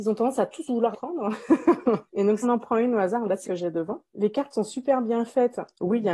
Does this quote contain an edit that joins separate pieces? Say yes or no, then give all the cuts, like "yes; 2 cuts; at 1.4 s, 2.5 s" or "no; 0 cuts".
yes; 5 cuts; at 0.9 s, 2.1 s, 2.4 s, 3.4 s, 4.1 s